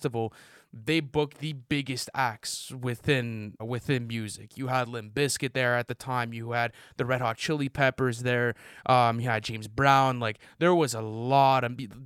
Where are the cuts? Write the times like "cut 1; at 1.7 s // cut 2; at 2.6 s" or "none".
cut 1; at 3.6 s